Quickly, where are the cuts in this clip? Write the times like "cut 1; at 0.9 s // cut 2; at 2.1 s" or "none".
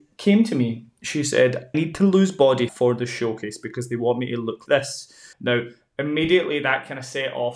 cut 1; at 1.7 s // cut 2; at 2.7 s // cut 3; at 4.7 s // cut 4; at 5.3 s